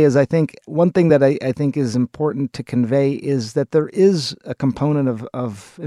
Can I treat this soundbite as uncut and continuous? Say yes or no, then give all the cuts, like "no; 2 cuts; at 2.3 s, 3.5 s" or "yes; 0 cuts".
yes; 0 cuts